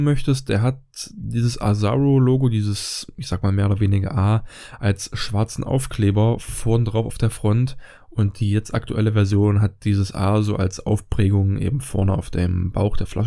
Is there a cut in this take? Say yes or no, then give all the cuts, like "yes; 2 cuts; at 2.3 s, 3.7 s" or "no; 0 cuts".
no; 0 cuts